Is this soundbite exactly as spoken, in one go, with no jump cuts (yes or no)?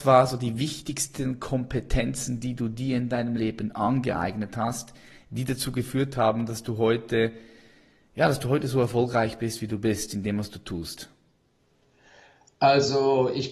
yes